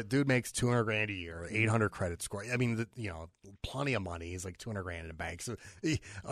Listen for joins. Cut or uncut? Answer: uncut